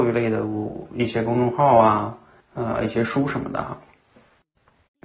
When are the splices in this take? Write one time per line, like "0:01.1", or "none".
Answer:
0:02.4